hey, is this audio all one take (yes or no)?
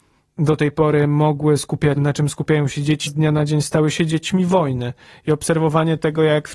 no